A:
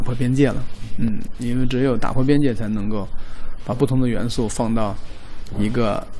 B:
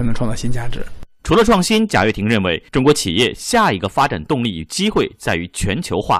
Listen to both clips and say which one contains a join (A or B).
B